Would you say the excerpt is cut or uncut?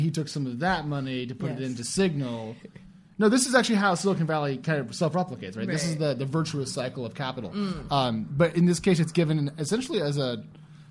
uncut